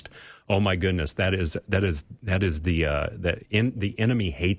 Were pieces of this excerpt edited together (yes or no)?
no